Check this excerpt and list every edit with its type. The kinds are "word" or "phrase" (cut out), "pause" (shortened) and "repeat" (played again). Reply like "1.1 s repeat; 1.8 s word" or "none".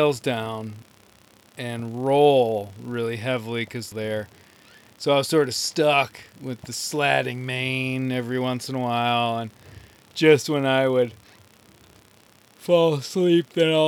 3.9 s phrase